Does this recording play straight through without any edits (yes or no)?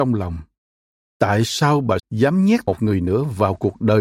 no